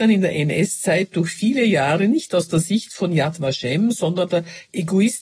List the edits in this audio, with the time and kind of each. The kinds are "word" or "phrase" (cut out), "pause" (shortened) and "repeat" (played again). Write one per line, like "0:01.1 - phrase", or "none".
0:04.3 - word